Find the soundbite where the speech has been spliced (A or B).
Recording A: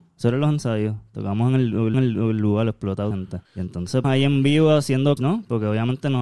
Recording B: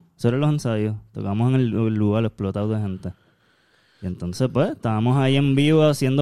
A